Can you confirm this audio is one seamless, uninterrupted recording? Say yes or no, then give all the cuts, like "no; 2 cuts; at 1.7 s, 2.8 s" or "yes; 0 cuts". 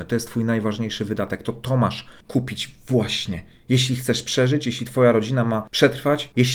no; 1 cut; at 2.2 s